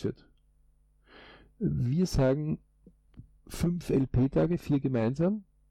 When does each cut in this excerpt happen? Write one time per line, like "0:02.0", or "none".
0:03.4